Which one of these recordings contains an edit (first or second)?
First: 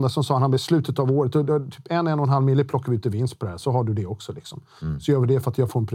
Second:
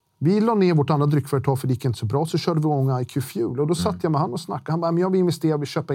first